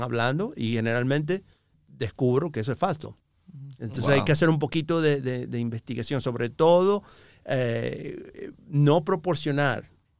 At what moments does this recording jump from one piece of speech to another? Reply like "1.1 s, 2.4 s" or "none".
none